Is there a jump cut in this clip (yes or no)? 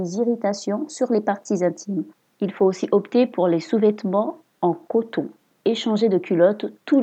yes